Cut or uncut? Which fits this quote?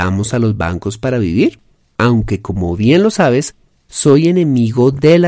uncut